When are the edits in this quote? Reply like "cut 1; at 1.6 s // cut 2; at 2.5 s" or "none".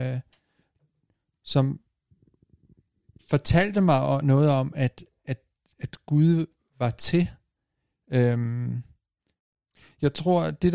none